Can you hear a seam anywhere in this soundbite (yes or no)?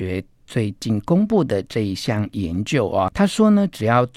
yes